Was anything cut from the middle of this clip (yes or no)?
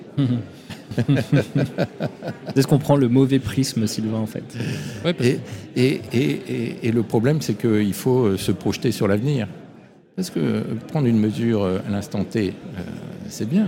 no